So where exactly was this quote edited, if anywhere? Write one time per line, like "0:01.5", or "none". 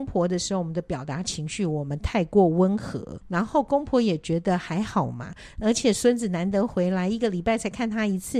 0:03.2